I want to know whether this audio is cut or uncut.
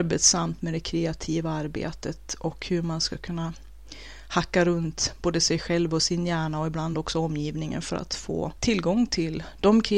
uncut